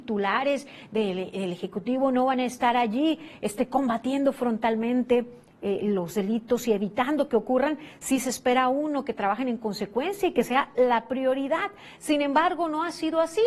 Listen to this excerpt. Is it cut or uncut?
uncut